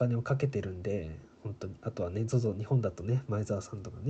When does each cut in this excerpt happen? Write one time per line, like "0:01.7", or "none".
none